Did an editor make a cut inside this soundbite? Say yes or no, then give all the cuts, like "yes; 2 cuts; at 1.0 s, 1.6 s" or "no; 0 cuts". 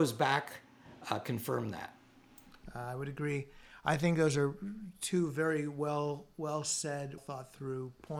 yes; 1 cut; at 7.2 s